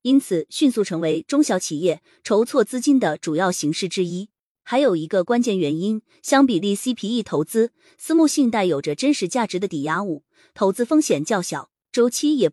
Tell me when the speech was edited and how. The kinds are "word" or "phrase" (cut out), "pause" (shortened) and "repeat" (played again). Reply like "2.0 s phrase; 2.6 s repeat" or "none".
none

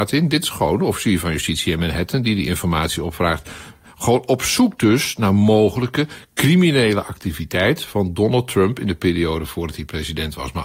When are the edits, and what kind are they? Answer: none

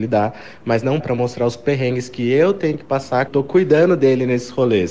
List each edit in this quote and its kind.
1.0 s word; 3.3 s phrase

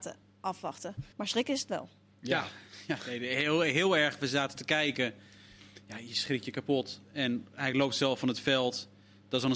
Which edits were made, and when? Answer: 1.1 s pause; 2.1 s pause

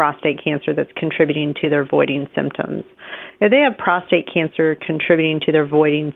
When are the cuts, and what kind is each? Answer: none

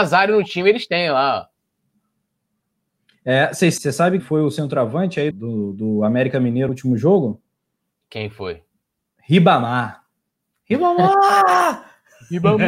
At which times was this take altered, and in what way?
3.8 s word; 4.2 s word; 5.3 s word; 6.7 s word

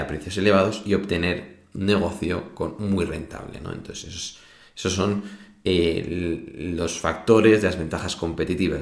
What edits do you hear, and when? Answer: none

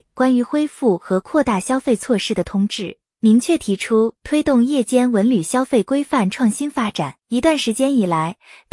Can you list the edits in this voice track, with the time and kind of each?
7.2 s pause

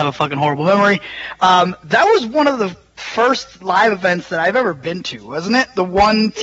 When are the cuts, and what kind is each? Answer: none

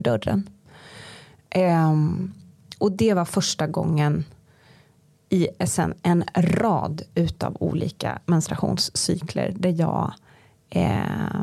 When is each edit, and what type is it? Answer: none

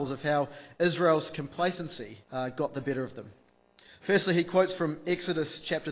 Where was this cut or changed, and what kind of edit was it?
2.2 s pause

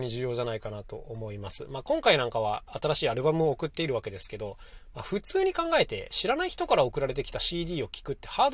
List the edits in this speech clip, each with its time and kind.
none

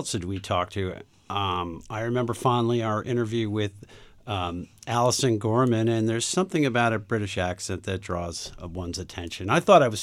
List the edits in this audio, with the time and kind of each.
none

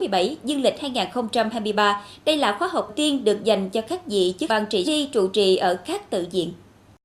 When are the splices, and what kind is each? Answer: 2.9 s word; 4.5 s phrase; 4.8 s phrase

